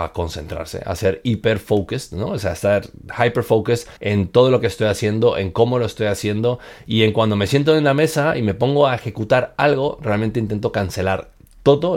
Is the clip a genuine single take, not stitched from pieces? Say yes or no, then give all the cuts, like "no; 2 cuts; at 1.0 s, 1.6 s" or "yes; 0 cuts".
no; 1 cut; at 4.0 s